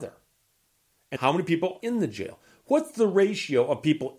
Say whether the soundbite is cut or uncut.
cut